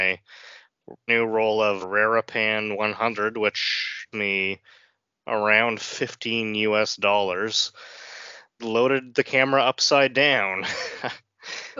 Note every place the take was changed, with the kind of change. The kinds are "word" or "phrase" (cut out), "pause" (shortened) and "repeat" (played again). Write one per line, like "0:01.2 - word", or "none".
0:01.1 - word
0:01.8 - word
0:04.1 - word
0:08.6 - word